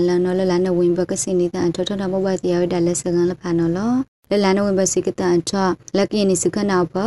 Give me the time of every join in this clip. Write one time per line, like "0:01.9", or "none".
none